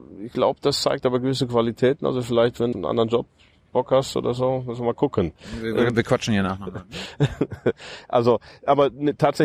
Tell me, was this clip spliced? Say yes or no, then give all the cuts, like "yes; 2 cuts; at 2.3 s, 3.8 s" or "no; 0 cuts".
yes; 1 cut; at 2.7 s